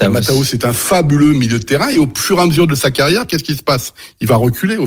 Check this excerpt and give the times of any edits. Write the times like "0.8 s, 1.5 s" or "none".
none